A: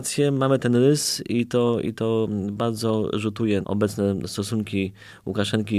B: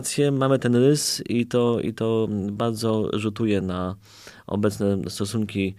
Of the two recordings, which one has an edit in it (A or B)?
A